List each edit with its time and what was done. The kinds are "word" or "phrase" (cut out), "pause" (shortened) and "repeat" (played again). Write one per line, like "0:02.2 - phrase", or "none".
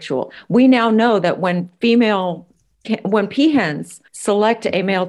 0:02.8 - word
0:04.1 - pause